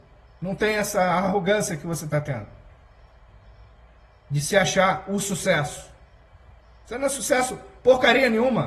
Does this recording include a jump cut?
no; 0 cuts

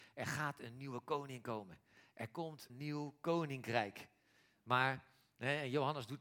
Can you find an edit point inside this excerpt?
yes; 1 cut; at 2.7 s

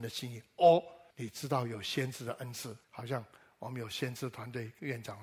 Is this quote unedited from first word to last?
no; 2 cuts; at 1.1 s, 2.8 s

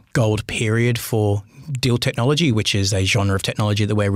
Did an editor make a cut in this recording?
no; 0 cuts

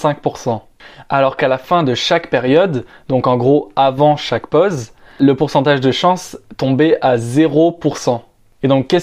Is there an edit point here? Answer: no; 0 cuts

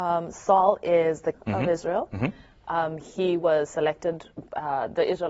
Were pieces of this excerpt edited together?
yes; 1 cut; at 1.3 s

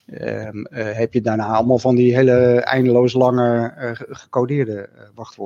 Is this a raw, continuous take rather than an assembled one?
yes; 0 cuts

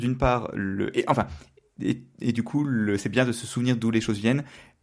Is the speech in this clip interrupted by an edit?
no; 0 cuts

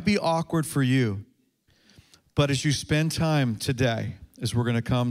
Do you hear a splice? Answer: no; 0 cuts

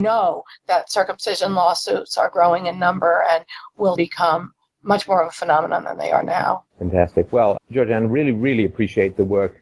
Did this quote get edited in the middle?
yes; 3 cuts; at 4.0 s, 6.7 s, 7.6 s

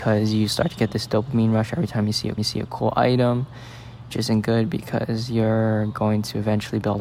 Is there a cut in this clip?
yes; 2 cuts; at 2.4 s, 4.1 s

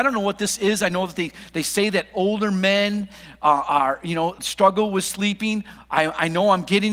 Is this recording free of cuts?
yes; 0 cuts

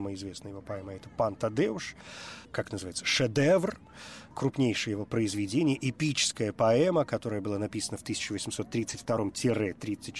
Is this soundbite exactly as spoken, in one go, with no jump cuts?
yes; 0 cuts

